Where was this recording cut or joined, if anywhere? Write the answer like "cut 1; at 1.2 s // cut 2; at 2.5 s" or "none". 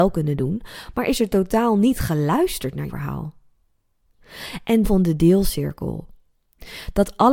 cut 1; at 2.9 s // cut 2; at 4.8 s